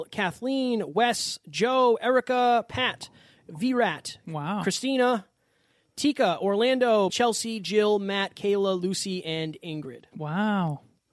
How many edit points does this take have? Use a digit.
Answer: 1